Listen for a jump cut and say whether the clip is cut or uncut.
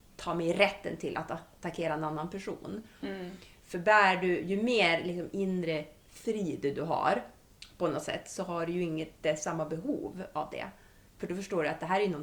uncut